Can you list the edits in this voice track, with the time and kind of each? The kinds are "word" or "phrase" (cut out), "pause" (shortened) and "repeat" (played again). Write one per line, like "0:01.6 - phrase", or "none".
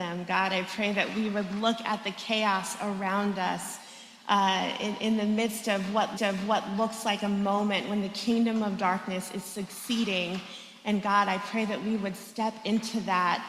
0:06.2 - repeat